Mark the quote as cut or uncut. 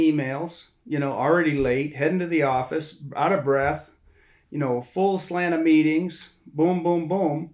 uncut